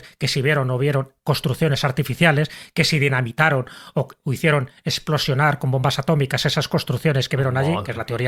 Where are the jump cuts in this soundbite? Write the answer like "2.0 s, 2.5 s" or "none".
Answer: none